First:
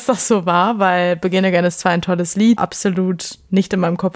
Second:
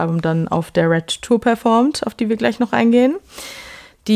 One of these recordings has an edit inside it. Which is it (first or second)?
first